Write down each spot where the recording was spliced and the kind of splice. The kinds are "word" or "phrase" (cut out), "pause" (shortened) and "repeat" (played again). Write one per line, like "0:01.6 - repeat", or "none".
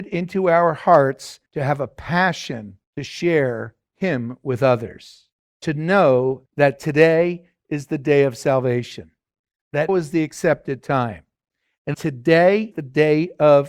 0:01.5 - pause
0:02.8 - pause
0:05.3 - pause
0:06.5 - pause
0:09.9 - word
0:11.9 - word
0:12.7 - word